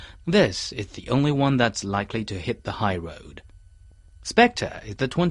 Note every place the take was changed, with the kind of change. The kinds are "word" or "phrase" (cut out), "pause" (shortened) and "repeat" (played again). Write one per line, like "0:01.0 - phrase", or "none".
none